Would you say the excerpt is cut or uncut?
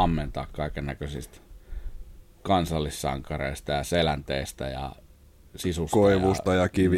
uncut